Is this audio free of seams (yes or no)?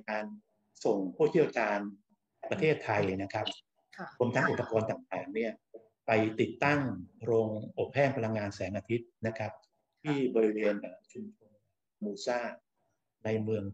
yes